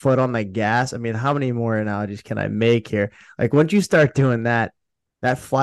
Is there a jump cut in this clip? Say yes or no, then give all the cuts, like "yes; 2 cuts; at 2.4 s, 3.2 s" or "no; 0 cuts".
no; 0 cuts